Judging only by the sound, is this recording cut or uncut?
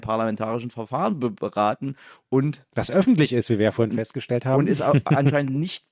uncut